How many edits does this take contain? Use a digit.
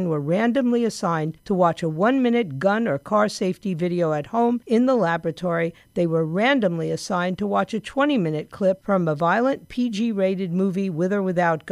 0